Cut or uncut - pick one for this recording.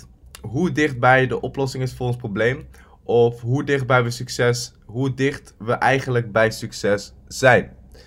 uncut